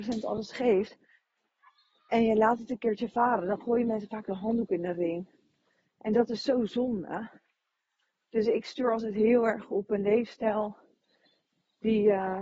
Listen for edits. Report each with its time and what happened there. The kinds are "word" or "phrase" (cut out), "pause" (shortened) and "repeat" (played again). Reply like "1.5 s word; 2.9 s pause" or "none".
none